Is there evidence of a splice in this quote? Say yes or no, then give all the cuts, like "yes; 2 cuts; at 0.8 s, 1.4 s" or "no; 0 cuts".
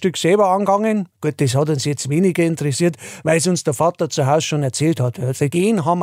yes; 1 cut; at 1.1 s